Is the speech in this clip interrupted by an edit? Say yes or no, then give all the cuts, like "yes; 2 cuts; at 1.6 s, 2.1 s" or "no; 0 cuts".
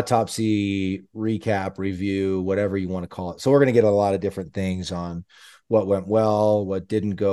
no; 0 cuts